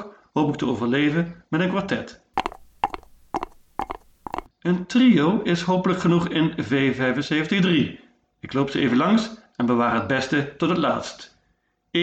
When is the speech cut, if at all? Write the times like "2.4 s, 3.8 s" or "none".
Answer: none